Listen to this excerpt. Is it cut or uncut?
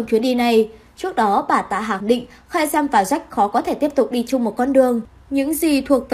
cut